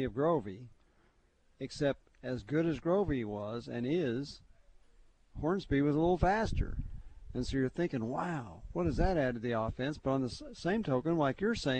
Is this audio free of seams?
yes; 0 cuts

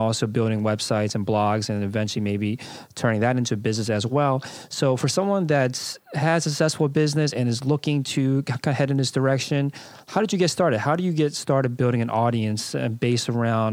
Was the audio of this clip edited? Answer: no; 0 cuts

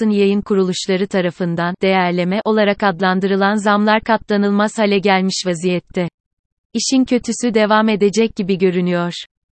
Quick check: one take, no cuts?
yes; 0 cuts

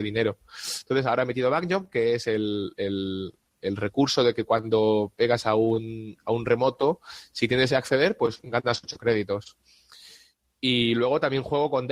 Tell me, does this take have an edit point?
yes; 1 cut; at 7.7 s

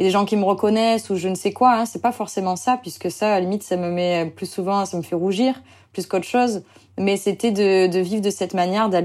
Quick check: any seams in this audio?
no; 0 cuts

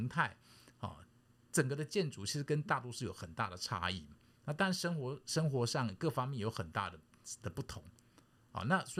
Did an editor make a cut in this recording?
no; 0 cuts

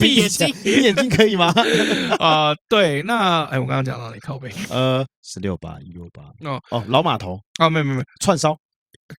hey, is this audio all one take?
no; 1 cut; at 7.5 s

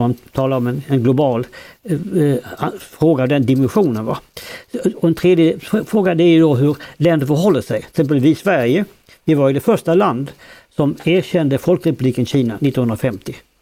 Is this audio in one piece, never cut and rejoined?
yes; 0 cuts

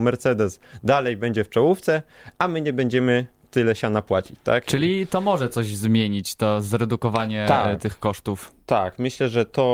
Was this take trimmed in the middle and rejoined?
no; 0 cuts

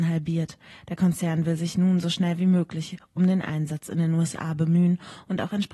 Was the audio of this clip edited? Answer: no; 0 cuts

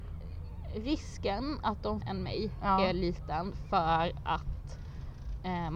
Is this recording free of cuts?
no; 1 cut; at 2.0 s

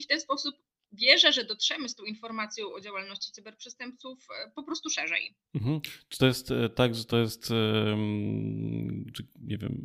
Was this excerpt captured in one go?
yes; 0 cuts

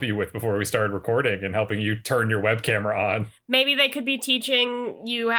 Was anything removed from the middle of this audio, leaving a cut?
no; 0 cuts

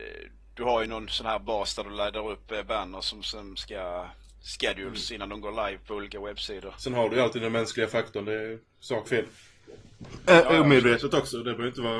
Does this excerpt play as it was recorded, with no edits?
no; 1 cut; at 9.1 s

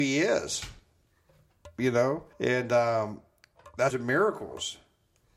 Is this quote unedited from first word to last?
no; 2 cuts; at 2.3 s, 3.9 s

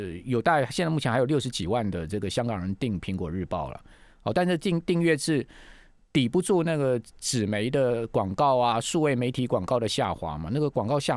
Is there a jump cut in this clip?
no; 0 cuts

